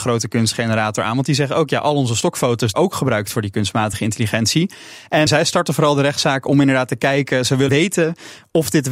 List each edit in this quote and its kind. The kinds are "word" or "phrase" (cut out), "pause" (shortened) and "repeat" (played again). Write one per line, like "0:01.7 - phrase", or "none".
0:02.7 - phrase
0:05.3 - word
0:07.7 - word